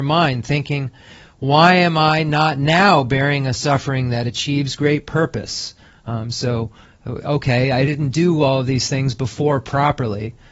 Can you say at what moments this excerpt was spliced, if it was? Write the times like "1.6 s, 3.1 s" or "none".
none